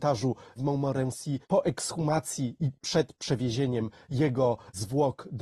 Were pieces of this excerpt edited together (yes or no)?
yes